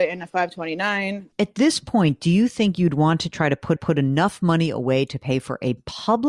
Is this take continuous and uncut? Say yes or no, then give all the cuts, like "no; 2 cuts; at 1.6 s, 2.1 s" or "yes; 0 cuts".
no; 1 cut; at 3.8 s